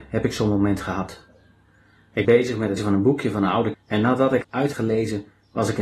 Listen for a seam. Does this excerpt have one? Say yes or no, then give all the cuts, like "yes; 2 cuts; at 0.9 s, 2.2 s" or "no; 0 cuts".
yes; 5 cuts; at 2.2 s, 2.8 s, 3.7 s, 4.4 s, 4.7 s